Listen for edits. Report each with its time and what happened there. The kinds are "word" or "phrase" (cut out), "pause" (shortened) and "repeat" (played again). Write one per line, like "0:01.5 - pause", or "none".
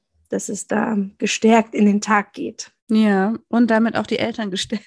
0:02.8 - pause